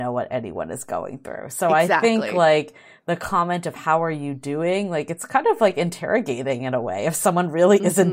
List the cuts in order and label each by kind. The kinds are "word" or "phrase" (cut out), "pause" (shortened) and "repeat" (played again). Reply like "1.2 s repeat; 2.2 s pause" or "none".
none